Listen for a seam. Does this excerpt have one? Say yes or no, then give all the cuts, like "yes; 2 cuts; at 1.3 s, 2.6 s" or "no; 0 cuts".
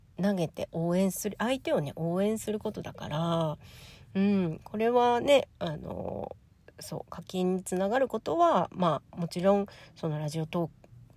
no; 0 cuts